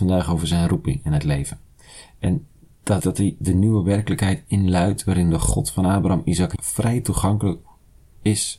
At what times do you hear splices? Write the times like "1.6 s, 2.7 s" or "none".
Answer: 3.0 s, 6.5 s